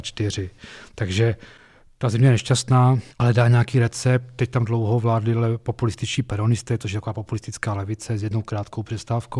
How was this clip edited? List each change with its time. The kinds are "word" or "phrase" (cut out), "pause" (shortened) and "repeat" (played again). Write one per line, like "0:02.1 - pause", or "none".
0:03.1 - pause